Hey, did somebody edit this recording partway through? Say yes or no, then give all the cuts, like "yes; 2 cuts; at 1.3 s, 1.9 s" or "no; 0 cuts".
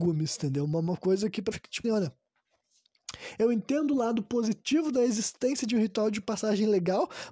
yes; 2 cuts; at 1.5 s, 1.8 s